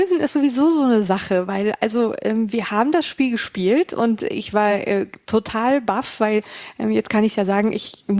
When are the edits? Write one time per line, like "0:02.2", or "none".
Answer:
none